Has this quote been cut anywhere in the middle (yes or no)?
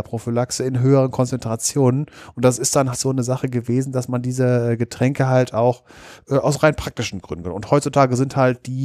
yes